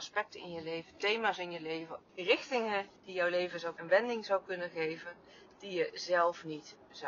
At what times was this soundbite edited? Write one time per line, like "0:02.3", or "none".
0:03.8